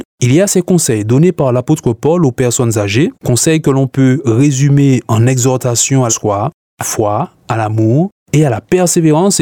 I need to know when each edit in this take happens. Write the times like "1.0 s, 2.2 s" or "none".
3.1 s, 6.1 s, 6.8 s

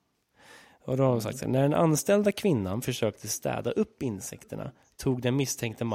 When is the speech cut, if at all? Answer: none

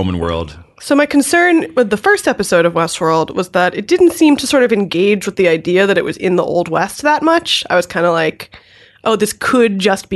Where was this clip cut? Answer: none

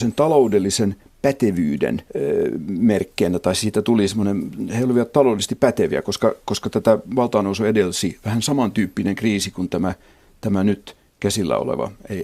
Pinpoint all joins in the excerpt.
2.1 s

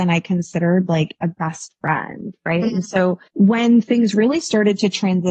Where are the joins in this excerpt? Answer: 3.3 s

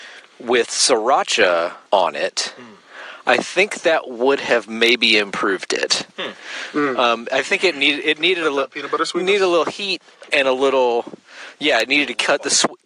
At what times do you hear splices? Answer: 1.9 s

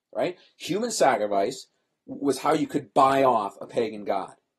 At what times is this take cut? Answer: none

